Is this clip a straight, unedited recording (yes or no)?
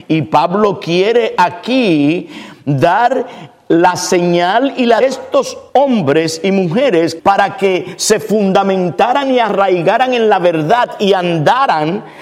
no